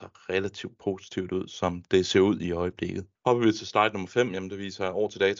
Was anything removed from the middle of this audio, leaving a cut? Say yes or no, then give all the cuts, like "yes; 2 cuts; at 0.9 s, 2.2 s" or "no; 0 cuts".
yes; 1 cut; at 3.2 s